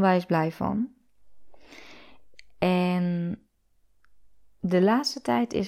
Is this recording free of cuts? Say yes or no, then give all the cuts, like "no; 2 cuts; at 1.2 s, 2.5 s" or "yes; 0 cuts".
yes; 0 cuts